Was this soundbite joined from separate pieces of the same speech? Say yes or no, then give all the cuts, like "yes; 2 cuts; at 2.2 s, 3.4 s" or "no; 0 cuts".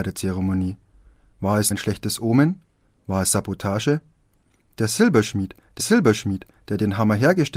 yes; 2 cuts; at 1.7 s, 5.8 s